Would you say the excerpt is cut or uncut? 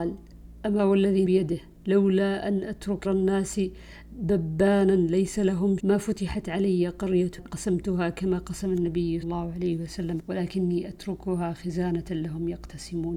cut